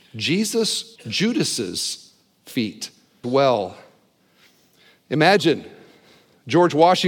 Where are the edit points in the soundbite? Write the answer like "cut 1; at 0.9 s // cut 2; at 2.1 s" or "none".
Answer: cut 1; at 1.0 s // cut 2; at 3.2 s